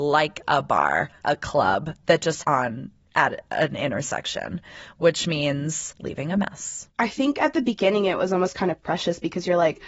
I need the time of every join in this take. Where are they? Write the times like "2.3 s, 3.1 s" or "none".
1.2 s, 2.4 s, 5.9 s